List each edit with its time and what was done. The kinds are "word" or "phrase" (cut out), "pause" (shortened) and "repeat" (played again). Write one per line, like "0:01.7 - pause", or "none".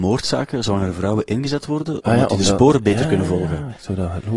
none

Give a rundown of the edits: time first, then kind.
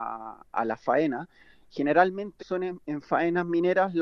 0:02.4 - word

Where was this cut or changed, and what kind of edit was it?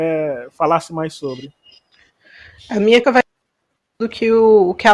0:03.0 - word

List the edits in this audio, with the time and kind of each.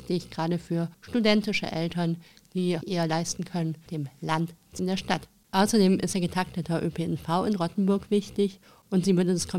0:00.9 - pause
0:02.8 - phrase
0:03.9 - word
0:04.8 - phrase
0:06.1 - phrase

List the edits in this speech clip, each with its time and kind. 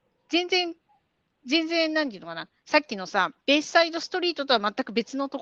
0:03.4 - pause

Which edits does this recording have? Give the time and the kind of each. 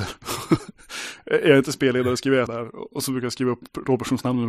0:02.5 - word

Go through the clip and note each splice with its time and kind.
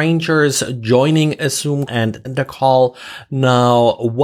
0:01.9 - word
0:02.2 - word

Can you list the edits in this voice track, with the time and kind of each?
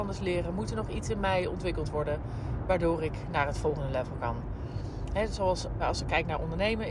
0:05.8 - word

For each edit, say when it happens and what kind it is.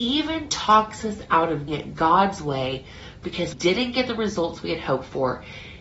0:01.7 - word
0:03.5 - word

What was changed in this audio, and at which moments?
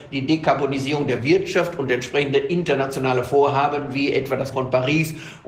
0:04.5 - word

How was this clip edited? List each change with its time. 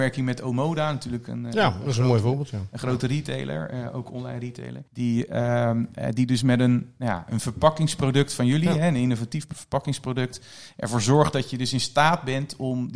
0:04.9 - pause

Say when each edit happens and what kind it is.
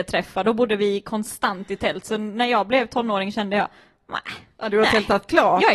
none

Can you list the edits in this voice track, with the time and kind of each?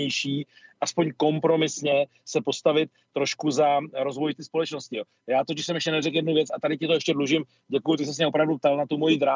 none

